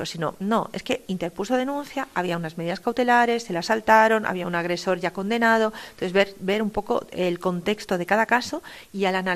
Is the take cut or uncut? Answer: uncut